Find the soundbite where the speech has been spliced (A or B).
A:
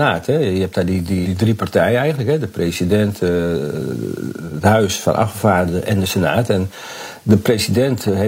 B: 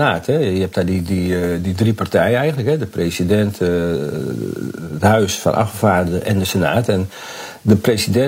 A